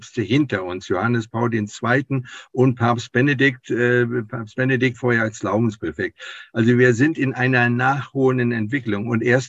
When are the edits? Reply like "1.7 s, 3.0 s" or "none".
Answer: 4.9 s